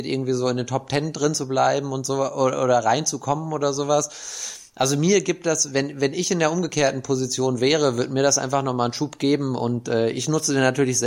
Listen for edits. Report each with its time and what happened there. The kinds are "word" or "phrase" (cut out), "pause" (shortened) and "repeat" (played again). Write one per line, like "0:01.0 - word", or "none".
none